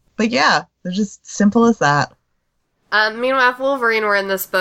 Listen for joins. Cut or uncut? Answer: uncut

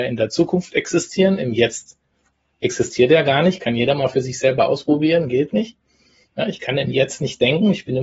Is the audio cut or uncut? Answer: uncut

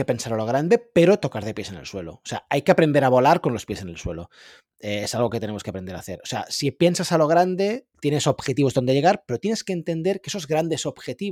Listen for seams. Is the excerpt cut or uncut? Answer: uncut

